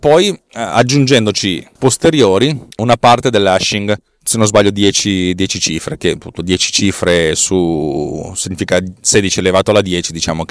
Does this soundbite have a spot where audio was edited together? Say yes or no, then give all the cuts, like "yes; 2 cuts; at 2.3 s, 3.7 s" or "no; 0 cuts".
yes; 2 cuts; at 1.8 s, 2.7 s